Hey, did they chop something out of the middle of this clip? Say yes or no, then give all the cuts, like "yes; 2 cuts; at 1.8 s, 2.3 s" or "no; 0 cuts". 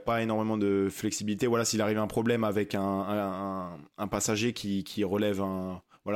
no; 0 cuts